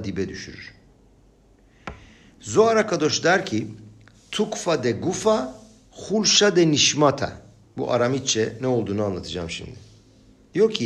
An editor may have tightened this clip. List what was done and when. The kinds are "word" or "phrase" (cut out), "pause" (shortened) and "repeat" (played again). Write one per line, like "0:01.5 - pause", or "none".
none